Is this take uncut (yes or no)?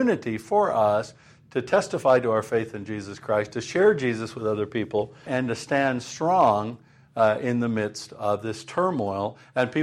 no